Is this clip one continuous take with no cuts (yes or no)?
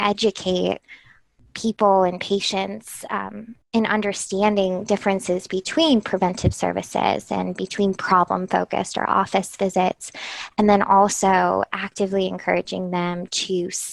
yes